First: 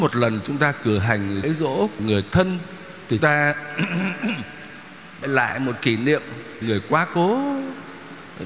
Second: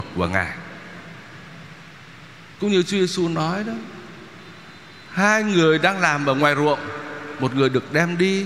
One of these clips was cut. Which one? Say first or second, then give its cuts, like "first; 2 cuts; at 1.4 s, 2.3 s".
first; 6 cuts; at 1.4 s, 2.0 s, 3.2 s, 5.2 s, 5.8 s, 6.6 s